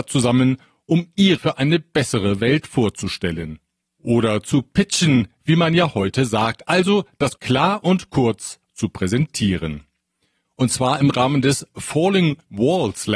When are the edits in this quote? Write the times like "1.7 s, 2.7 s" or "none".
1.4 s, 7.4 s